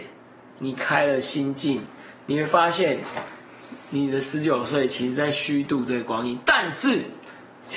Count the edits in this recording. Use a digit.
0